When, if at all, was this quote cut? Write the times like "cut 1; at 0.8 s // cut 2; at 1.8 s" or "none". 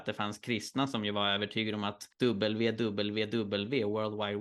cut 1; at 2.1 s